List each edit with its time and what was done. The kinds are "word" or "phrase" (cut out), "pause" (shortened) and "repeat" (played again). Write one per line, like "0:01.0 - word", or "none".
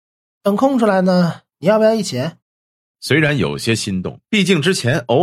0:01.5 - pause
0:02.4 - pause
0:04.2 - pause